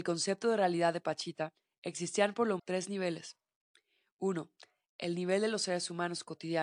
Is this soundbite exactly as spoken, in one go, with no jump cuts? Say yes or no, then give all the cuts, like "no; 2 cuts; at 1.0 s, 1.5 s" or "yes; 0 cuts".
no; 1 cut; at 2.6 s